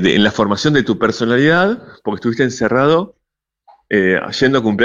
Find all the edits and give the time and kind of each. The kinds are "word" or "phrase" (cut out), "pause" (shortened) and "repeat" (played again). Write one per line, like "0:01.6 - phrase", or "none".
none